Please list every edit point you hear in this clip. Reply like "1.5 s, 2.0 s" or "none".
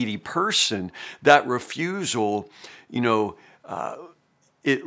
none

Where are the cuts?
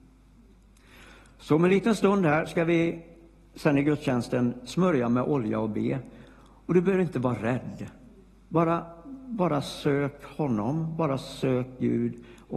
none

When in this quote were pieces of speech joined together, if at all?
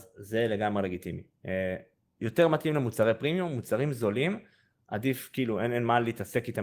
none

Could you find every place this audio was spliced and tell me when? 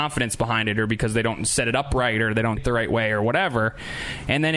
2.6 s

